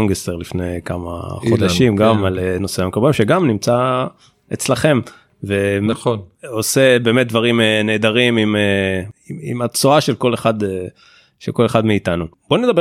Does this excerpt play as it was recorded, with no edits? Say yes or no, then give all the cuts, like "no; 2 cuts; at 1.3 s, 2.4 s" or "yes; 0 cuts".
yes; 0 cuts